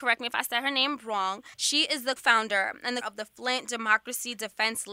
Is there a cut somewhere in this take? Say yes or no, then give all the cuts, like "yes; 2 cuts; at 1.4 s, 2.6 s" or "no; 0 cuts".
yes; 3 cuts; at 1.5 s, 2.2 s, 3.0 s